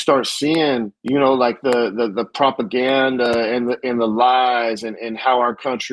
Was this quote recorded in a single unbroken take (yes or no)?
no